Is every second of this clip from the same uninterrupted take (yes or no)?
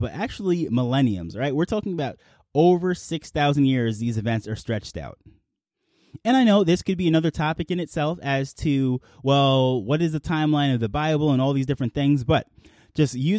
yes